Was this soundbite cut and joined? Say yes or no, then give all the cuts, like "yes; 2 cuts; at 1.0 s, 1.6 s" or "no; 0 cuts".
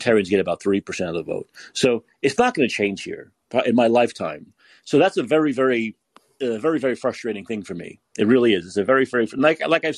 no; 0 cuts